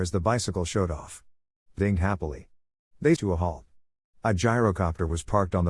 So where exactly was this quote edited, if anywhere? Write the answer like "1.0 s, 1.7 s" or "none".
1.8 s, 3.2 s